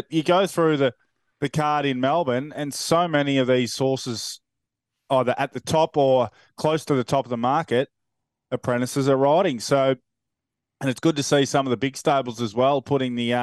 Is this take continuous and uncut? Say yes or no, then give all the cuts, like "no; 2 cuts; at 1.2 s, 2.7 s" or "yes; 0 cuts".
yes; 0 cuts